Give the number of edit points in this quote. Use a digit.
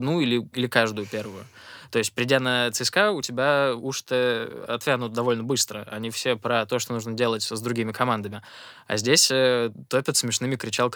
0